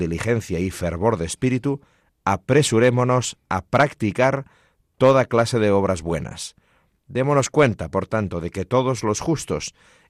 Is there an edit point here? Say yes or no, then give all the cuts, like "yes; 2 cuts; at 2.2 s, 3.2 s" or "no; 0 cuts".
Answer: no; 0 cuts